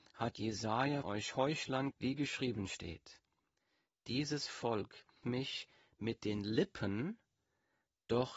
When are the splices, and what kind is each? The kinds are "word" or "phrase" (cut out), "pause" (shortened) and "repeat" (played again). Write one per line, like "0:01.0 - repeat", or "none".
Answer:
0:01.0 - word
0:01.9 - word
0:05.2 - word